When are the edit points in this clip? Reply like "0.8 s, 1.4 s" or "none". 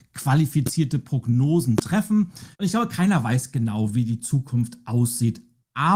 2.5 s